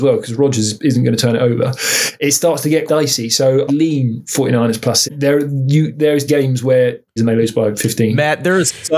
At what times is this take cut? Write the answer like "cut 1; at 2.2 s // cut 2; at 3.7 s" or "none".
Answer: cut 1; at 2.9 s // cut 2; at 3.7 s // cut 3; at 5.0 s // cut 4; at 6.3 s // cut 5; at 7.2 s